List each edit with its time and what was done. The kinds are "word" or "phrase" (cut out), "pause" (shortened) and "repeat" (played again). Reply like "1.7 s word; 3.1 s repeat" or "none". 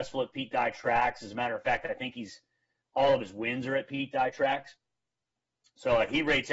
none